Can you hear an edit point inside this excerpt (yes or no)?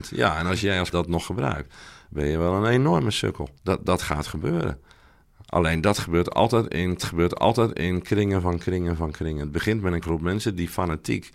yes